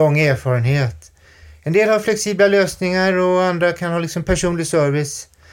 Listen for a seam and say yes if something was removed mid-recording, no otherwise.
no